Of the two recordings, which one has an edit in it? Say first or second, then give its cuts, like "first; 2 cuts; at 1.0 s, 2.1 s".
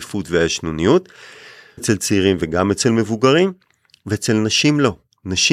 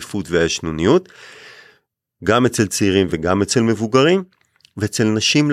first; 1 cut; at 1.8 s